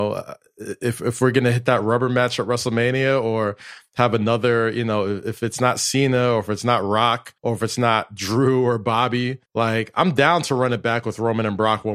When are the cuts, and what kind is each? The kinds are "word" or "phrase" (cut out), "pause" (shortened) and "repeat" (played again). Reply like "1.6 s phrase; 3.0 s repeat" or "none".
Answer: 7.4 s pause; 9.5 s pause

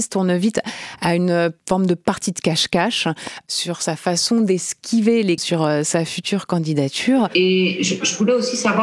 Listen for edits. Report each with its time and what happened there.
1.6 s pause; 5.4 s word

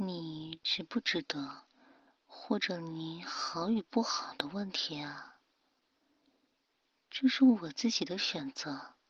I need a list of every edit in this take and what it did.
none

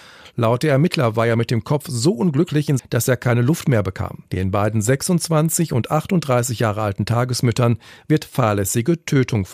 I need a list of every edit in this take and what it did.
2.8 s phrase; 4.3 s pause

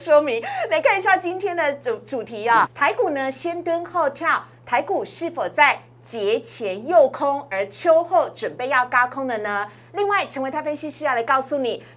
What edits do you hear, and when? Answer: 2.7 s word

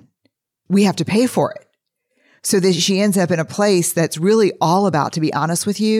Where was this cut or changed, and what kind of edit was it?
none

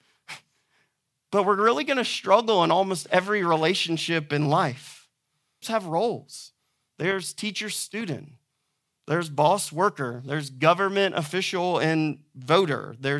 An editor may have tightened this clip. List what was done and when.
5.6 s phrase

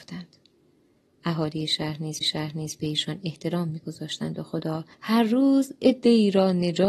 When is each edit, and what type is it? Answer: 2.2 s repeat; 4.9 s pause

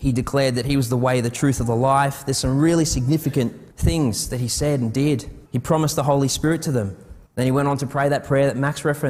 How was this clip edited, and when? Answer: 3.7 s pause; 5.5 s pause; 7.3 s pause

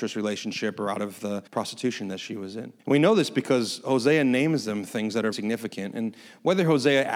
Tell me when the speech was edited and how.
1.5 s pause; 2.8 s pause; 5.3 s word

